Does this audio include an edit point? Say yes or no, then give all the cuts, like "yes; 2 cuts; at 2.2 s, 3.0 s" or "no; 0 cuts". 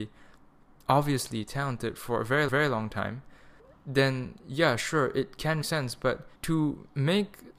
yes; 4 cuts; at 2.5 s, 3.6 s, 5.6 s, 6.4 s